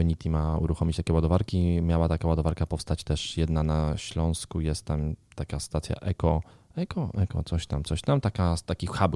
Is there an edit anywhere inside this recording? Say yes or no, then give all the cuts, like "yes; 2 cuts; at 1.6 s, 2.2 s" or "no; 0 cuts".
yes; 1 cut; at 6.5 s